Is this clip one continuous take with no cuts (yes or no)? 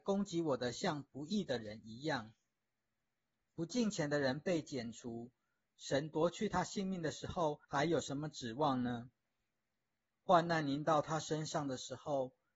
no